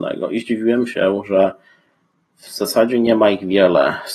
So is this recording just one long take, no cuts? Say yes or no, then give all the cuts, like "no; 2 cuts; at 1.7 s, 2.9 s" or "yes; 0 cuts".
yes; 0 cuts